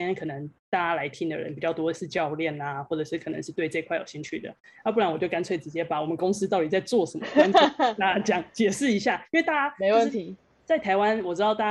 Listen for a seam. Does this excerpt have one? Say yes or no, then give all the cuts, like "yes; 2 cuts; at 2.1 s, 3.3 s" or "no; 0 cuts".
no; 0 cuts